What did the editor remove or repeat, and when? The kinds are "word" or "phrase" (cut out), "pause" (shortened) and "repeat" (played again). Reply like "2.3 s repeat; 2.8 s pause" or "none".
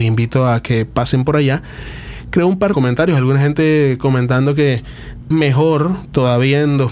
2.7 s phrase; 5.3 s word